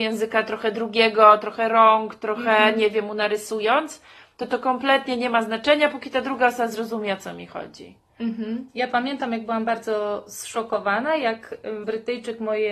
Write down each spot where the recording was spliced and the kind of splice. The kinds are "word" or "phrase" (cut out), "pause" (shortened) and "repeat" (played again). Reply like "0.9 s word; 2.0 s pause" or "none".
11.8 s word